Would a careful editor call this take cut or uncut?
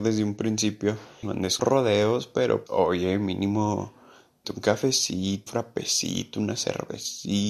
cut